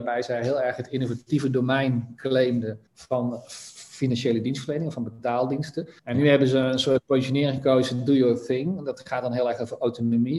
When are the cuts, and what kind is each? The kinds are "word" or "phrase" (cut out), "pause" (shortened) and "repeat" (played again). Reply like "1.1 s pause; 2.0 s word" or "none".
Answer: 2.9 s pause; 6.0 s pause